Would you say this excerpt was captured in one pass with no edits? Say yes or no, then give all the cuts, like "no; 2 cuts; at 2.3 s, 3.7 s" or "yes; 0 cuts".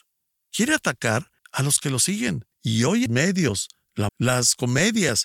no; 4 cuts; at 1.4 s, 2.5 s, 3.1 s, 4.1 s